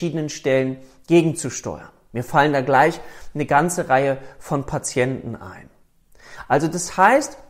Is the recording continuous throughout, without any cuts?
yes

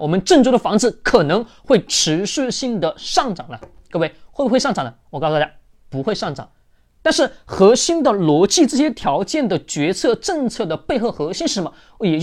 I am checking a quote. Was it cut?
no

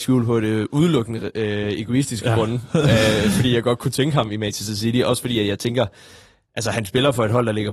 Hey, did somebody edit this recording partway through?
no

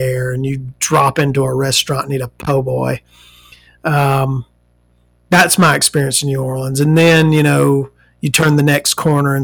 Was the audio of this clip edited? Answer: no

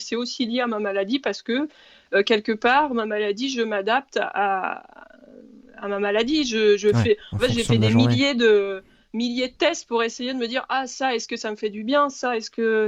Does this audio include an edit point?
no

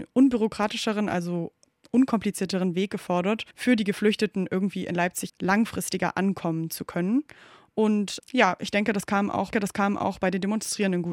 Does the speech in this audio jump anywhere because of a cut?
yes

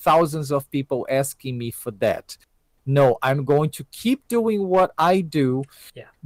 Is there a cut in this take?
no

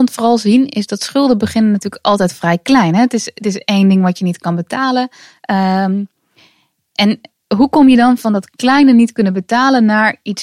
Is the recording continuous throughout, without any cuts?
yes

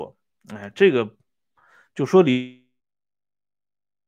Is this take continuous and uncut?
yes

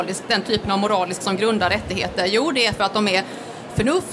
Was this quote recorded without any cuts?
no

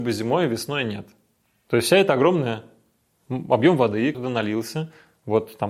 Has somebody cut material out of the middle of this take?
yes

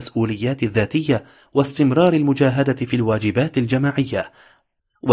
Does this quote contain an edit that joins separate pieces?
no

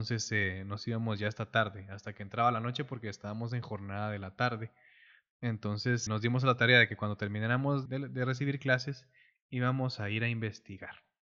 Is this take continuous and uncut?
no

